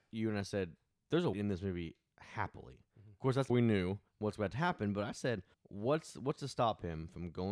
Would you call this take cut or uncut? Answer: cut